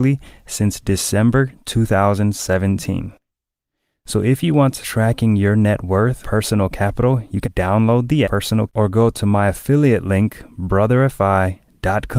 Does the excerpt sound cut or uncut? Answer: cut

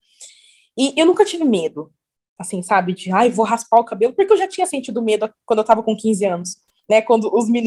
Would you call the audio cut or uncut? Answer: uncut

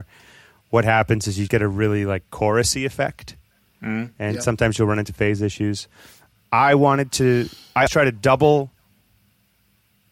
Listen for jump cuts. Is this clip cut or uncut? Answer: cut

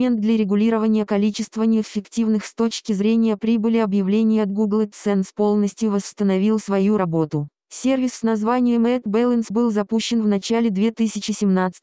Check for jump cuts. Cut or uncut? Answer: uncut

